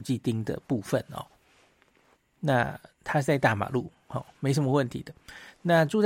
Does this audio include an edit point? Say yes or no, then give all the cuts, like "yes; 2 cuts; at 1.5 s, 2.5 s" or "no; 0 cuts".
no; 0 cuts